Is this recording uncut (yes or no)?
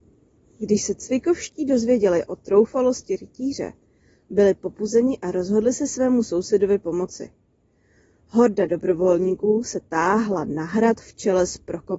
yes